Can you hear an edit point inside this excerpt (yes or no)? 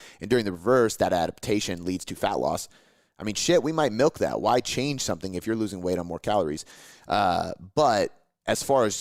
no